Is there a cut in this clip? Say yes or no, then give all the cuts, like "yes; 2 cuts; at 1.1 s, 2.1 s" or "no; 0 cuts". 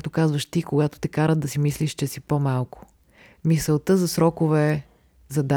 no; 0 cuts